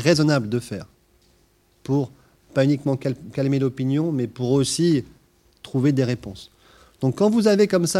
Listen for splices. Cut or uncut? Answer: uncut